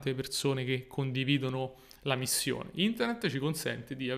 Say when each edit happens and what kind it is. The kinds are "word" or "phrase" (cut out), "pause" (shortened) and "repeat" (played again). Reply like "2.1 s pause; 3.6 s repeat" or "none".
none